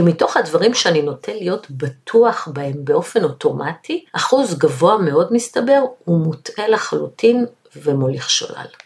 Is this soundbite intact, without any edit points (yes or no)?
no